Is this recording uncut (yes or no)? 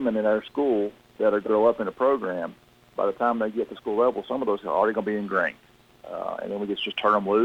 no